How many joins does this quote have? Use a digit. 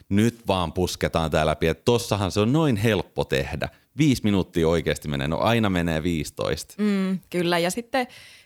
0